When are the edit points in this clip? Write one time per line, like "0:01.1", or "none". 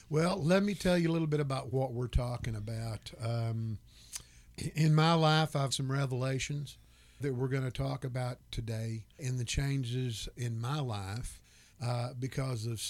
0:04.5
0:05.7
0:07.2
0:09.2